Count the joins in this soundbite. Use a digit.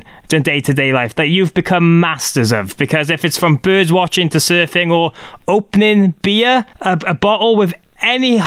1